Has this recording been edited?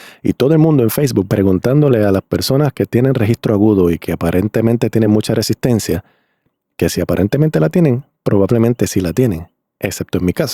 no; 0 cuts

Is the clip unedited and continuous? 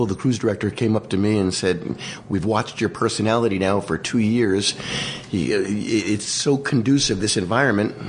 yes; 0 cuts

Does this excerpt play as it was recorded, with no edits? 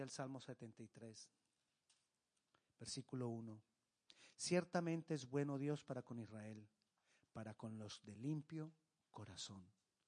yes; 0 cuts

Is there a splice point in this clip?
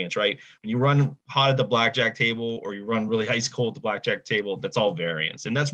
no; 0 cuts

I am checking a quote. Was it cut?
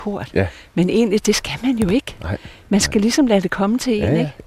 no; 0 cuts

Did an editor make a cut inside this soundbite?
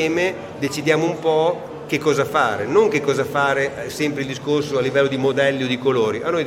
no; 0 cuts

